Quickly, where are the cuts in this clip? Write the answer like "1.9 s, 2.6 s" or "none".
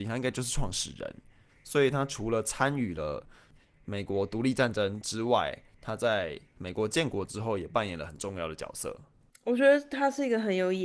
none

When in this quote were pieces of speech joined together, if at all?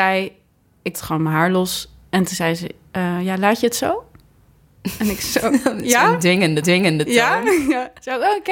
0.9 s, 6.6 s

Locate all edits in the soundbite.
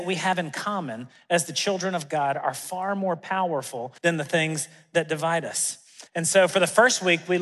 4.0 s, 6.1 s

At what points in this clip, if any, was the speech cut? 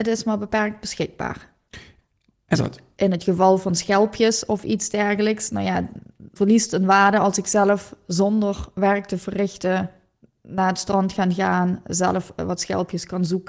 2.5 s, 6.4 s

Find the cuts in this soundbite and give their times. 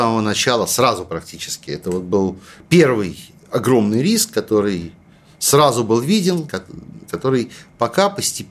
none

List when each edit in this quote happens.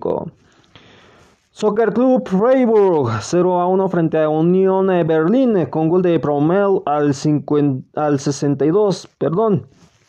9.1 s

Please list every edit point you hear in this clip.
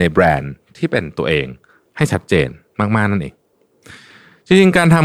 none

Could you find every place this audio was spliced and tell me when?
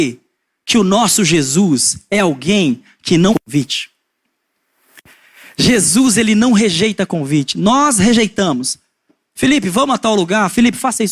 3.3 s

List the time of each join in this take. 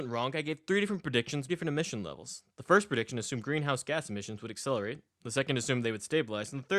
1.5 s

